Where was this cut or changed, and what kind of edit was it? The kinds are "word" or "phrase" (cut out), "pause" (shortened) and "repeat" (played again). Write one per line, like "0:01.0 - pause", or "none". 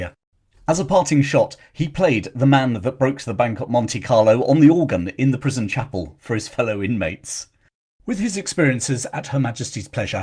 none